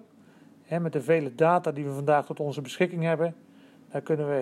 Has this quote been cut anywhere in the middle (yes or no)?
no